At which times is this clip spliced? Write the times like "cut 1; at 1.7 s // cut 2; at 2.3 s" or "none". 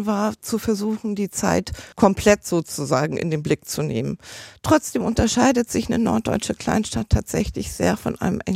cut 1; at 1.9 s